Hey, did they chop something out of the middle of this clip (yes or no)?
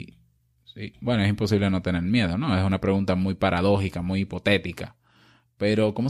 no